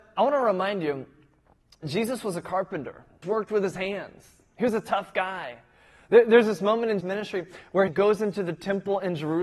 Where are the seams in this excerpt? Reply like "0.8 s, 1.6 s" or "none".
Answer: 1.8 s, 3.2 s, 7.0 s, 7.9 s

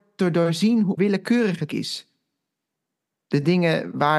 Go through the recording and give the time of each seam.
1.0 s, 1.7 s

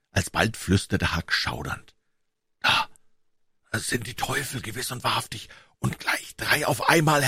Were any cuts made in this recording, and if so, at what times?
none

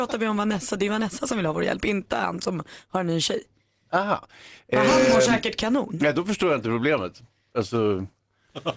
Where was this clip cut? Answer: none

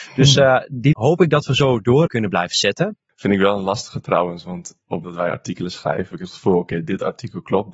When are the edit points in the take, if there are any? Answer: 0.9 s, 2.1 s, 5.0 s, 6.1 s

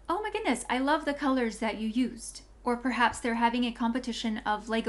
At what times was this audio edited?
2.6 s

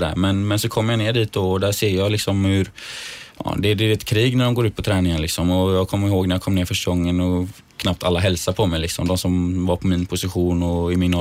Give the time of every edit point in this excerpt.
none

